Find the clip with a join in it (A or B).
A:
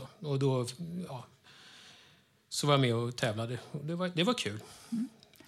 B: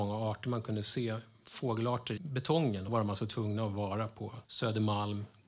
B